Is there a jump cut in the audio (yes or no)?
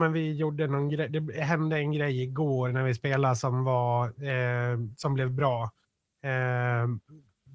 no